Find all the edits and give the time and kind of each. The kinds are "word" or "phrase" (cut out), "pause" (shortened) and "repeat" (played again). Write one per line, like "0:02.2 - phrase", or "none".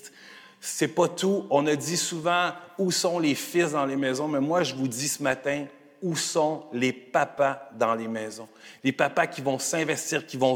none